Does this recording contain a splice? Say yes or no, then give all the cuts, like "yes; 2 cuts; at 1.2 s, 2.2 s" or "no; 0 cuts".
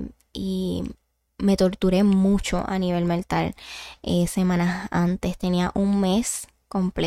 no; 0 cuts